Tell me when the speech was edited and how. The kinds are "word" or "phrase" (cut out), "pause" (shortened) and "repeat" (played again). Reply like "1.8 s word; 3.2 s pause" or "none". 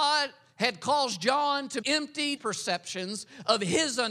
1.8 s word; 2.4 s phrase